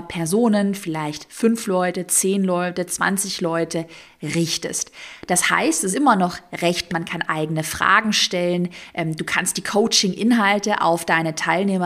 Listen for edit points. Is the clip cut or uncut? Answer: cut